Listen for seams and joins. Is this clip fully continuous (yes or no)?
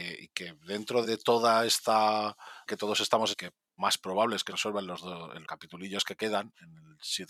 no